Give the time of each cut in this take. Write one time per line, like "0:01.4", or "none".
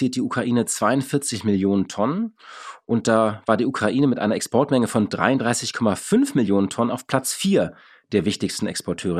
none